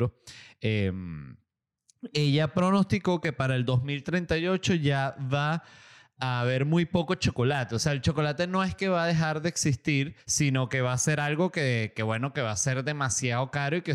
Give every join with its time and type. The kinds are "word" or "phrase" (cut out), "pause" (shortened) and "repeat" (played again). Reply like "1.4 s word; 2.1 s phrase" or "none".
10.2 s pause